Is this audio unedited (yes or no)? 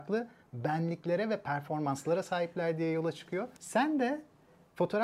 no